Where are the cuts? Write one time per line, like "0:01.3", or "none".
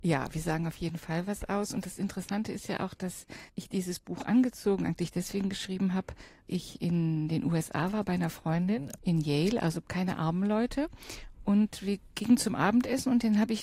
0:03.5
0:06.5